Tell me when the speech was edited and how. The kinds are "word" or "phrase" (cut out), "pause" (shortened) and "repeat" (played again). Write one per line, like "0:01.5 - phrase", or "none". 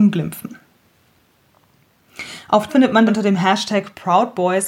0:02.7 - word
0:03.1 - word